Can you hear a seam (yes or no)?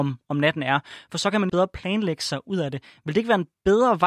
yes